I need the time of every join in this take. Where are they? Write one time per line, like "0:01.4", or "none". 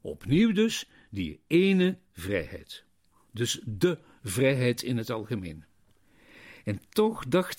none